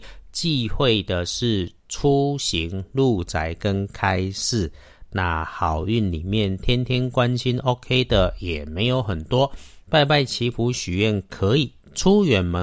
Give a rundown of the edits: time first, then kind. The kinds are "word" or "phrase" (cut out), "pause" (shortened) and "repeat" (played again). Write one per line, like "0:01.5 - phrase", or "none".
0:09.8 - pause